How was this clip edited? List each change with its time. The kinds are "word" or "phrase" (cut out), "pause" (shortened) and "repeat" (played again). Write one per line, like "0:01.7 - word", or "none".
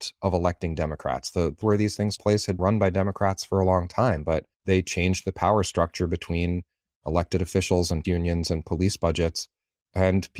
0:01.6 - word
0:02.2 - word
0:02.6 - word
0:04.5 - pause
0:08.0 - word